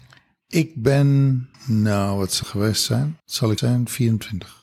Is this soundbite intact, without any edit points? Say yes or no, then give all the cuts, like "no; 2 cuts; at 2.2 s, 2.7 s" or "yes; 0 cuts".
no; 4 cuts; at 1.5 s, 2.4 s, 3.2 s, 3.6 s